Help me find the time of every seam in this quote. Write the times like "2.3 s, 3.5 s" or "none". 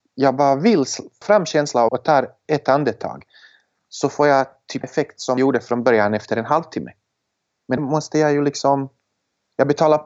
1.2 s, 1.9 s, 2.5 s, 4.8 s, 5.4 s, 7.8 s